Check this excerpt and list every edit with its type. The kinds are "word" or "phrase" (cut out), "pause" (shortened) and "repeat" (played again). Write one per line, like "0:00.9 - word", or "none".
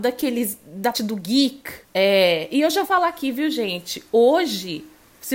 0:00.9 - word
0:01.8 - pause
0:02.8 - word